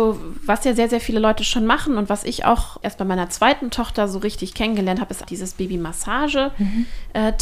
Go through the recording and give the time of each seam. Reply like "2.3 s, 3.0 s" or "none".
2.8 s, 5.2 s